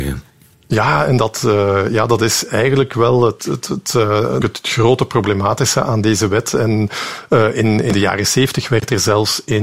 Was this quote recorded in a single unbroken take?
no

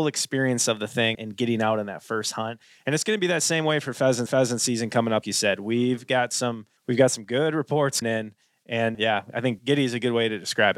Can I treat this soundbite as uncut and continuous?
no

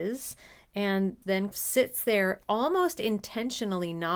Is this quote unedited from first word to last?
no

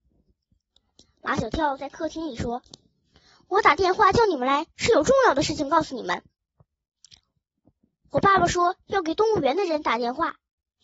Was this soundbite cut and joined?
no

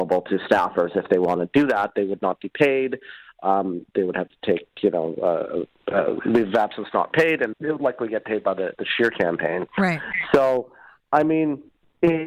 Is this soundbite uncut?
no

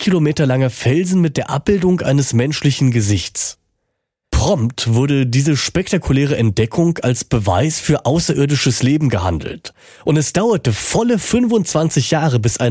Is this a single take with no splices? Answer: yes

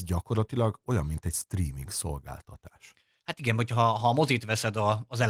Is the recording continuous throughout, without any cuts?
yes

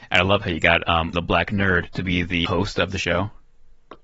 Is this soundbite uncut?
no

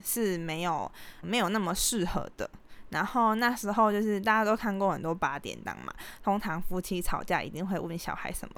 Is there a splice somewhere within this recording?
yes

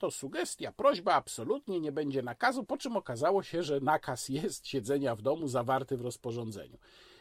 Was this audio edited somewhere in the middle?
no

